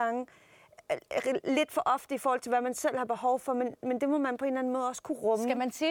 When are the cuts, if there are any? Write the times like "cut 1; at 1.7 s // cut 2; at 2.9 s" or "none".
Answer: none